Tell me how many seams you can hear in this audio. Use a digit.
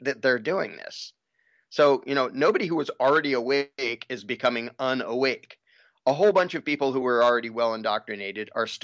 0